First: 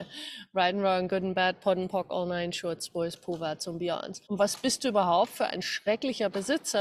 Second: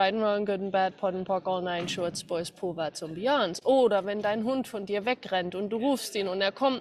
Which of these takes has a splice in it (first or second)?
first